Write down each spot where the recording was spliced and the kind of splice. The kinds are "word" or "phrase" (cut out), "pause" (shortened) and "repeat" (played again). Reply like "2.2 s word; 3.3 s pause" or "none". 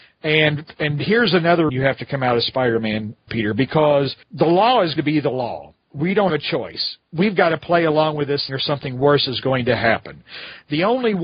1.7 s word; 3.3 s phrase; 4.2 s pause; 5.0 s word; 6.3 s word; 8.5 s word